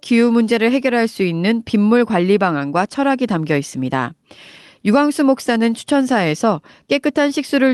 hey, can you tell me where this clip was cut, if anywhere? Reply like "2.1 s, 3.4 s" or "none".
none